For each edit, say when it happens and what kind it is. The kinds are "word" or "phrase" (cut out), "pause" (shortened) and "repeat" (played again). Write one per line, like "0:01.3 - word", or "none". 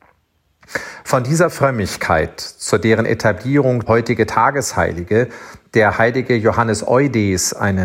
0:03.9 - word